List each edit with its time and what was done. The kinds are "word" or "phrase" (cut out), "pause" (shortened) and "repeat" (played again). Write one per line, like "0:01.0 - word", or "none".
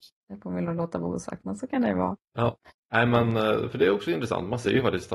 none